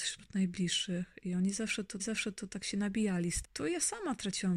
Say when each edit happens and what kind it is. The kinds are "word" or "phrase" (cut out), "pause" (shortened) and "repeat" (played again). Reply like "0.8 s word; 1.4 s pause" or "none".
2.0 s repeat; 3.4 s word